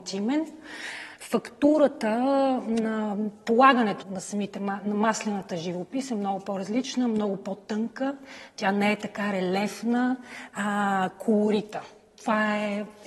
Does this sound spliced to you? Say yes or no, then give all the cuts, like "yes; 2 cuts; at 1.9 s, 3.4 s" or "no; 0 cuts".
yes; 1 cut; at 4.0 s